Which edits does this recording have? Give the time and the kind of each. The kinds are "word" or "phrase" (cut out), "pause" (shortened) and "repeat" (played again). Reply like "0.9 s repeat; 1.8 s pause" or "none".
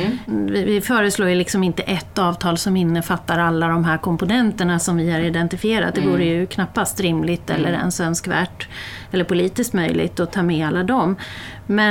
none